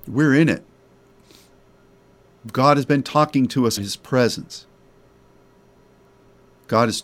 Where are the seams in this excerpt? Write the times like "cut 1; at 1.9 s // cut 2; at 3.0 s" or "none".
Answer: cut 1; at 3.8 s